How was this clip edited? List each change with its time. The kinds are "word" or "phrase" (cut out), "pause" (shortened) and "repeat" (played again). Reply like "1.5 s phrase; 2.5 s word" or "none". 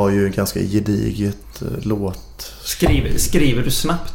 none